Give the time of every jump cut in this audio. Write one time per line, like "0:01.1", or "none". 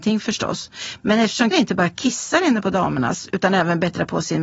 0:01.5